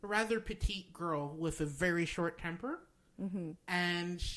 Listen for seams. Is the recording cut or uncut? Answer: uncut